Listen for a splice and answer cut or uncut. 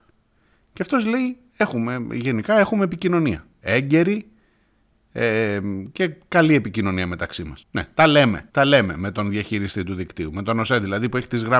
cut